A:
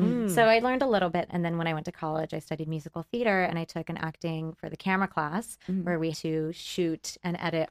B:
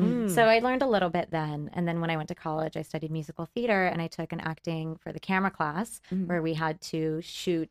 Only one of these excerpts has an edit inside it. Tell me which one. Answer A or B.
A